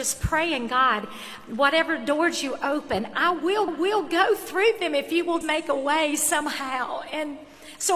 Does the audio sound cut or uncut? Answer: cut